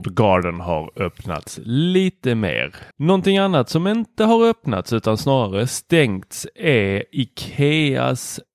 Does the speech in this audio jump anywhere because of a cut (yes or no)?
yes